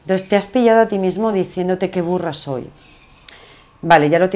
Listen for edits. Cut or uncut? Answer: uncut